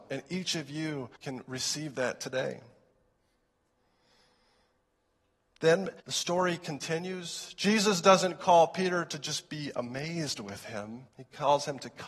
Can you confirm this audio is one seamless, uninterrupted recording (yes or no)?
no